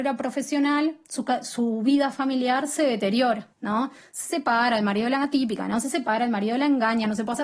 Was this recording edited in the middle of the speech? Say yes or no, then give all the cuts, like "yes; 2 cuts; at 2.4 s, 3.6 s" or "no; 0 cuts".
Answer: yes; 1 cut; at 3.5 s